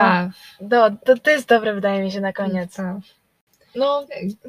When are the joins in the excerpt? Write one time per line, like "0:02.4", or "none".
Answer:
none